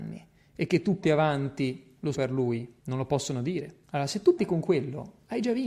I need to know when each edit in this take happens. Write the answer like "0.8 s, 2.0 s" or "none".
1.0 s, 2.1 s, 2.8 s, 3.8 s, 4.4 s